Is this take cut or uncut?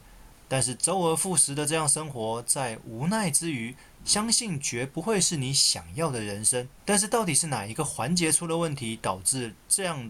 cut